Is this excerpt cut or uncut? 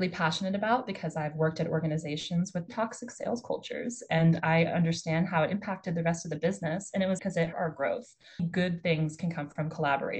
cut